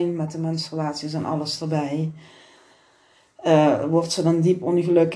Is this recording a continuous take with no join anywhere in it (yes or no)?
yes